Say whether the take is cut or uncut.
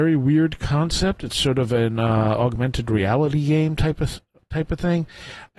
uncut